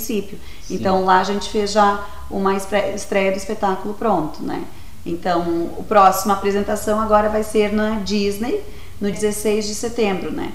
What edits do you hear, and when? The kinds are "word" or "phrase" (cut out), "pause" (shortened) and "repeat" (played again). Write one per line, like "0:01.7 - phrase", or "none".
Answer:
0:09.1 - word